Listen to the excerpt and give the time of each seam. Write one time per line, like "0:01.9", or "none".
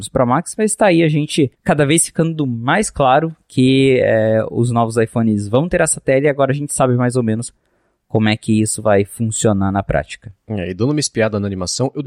0:01.5